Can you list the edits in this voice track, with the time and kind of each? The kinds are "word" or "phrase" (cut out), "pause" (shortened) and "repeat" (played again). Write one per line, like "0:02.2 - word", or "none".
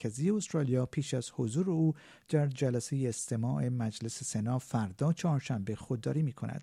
none